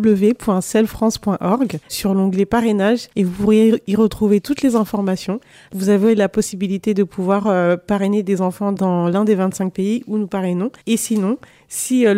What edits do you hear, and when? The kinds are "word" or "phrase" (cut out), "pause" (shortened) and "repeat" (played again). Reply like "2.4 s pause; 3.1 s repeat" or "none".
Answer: 1.8 s pause; 3.1 s pause; 10.8 s pause